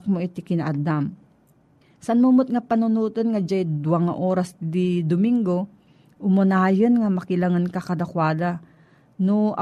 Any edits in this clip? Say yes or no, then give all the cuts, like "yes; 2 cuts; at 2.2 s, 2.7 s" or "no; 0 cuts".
no; 0 cuts